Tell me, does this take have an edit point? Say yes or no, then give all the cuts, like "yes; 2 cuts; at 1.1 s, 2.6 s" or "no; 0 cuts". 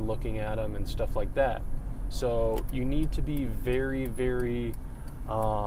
no; 0 cuts